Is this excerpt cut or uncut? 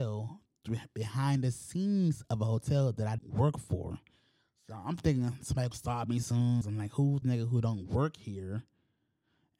cut